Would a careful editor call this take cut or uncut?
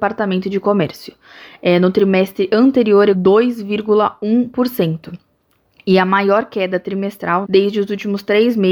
cut